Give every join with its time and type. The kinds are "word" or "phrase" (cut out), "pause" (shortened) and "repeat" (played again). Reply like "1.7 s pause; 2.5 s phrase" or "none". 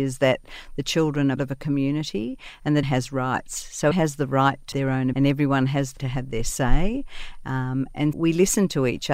1.4 s word; 2.8 s word; 3.9 s word; 4.7 s word; 5.1 s word; 6.0 s word; 8.1 s word

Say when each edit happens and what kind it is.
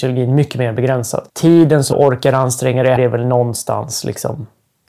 1.3 s pause; 1.9 s word; 3.0 s word

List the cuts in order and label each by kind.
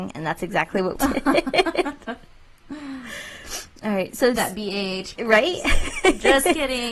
1.0 s word; 4.4 s word; 5.2 s word

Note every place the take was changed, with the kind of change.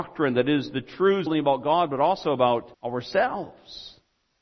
1.3 s phrase; 2.7 s pause

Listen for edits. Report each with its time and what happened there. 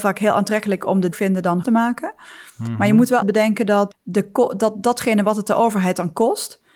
1.1 s phrase; 1.6 s word; 3.2 s word; 3.9 s word

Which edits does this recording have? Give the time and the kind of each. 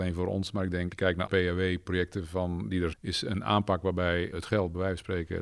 0.9 s word; 1.3 s word; 2.9 s word; 4.3 s word

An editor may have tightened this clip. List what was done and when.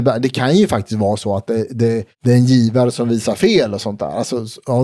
none

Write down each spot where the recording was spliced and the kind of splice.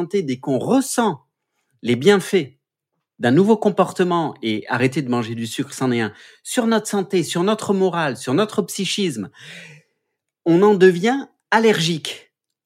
none

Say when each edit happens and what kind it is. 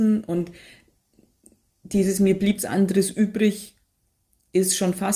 2.6 s word

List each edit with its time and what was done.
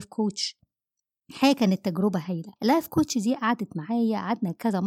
2.6 s pause

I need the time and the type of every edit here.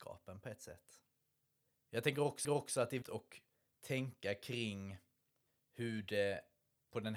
2.4 s repeat; 3.0 s word

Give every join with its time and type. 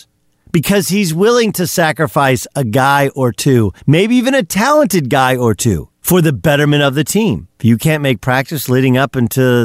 3.8 s pause; 5.9 s pause; 7.5 s pause

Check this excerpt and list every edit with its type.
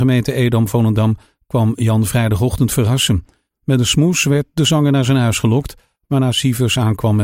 none

